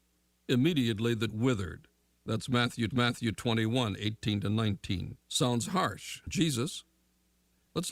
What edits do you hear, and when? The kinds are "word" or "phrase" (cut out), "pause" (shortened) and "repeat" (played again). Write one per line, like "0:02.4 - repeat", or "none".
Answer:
0:01.3 - word
0:02.1 - pause
0:02.9 - repeat
0:05.2 - pause
0:06.3 - word